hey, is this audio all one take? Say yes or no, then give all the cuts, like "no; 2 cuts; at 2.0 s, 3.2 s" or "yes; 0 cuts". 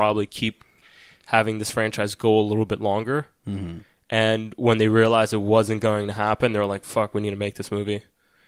yes; 0 cuts